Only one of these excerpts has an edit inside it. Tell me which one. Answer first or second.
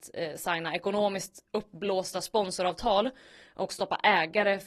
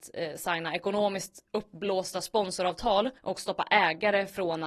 second